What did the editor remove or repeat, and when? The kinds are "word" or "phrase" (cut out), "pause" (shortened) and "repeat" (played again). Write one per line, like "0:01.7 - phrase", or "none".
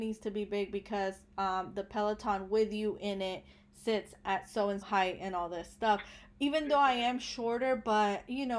0:04.8 - word